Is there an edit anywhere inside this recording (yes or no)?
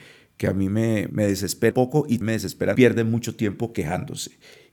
yes